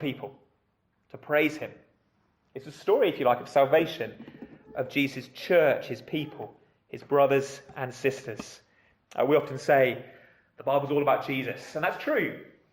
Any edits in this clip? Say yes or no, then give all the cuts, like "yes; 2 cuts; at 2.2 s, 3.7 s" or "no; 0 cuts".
no; 0 cuts